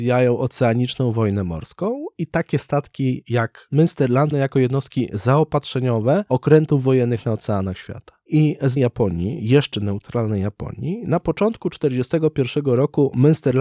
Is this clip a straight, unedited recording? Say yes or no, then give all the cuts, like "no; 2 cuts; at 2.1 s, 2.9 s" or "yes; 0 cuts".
no; 2 cuts; at 4.3 s, 8.8 s